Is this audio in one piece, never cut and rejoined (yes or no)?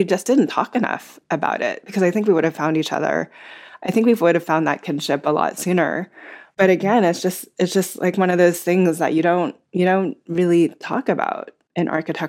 yes